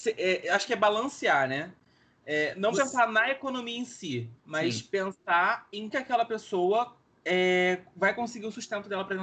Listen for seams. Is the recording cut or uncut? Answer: cut